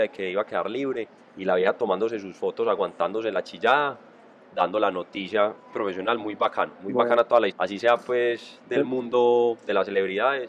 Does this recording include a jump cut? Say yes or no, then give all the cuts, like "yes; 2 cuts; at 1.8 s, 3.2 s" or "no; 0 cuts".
yes; 3 cuts; at 1.2 s, 5.7 s, 7.5 s